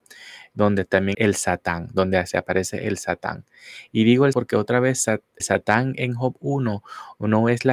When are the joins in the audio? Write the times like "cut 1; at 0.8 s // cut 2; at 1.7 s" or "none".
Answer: cut 1; at 1.1 s // cut 2; at 4.3 s // cut 3; at 5.4 s